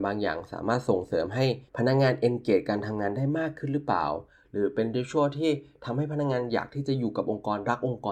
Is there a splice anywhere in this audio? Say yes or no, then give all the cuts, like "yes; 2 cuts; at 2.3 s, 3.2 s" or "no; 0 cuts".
yes; 1 cut; at 1.7 s